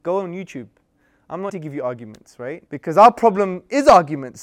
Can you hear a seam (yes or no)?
yes